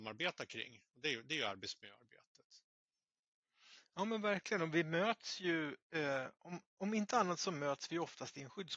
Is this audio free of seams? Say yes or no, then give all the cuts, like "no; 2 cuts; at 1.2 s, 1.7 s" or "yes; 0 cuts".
no; 1 cut; at 5.8 s